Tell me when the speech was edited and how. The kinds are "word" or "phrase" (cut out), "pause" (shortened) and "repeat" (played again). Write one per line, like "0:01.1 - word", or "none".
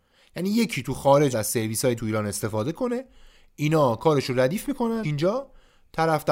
0:01.3 - word
0:02.0 - word
0:05.0 - word